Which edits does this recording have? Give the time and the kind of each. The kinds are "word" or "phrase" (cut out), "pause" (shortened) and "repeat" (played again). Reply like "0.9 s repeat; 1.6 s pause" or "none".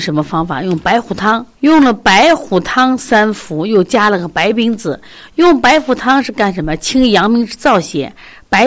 1.5 s pause